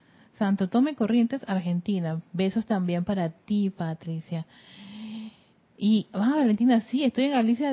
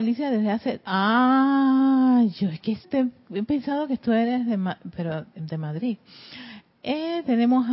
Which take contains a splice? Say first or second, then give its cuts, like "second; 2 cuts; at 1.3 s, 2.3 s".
second; 1 cut; at 2.8 s